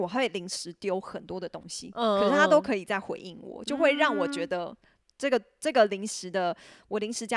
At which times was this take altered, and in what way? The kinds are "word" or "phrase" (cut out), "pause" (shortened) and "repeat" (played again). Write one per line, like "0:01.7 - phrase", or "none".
none